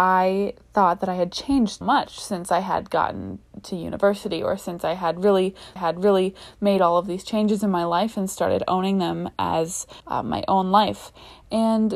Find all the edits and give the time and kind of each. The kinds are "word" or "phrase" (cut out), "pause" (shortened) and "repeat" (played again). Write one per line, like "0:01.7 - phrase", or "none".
0:01.8 - word
0:05.8 - repeat
0:10.0 - pause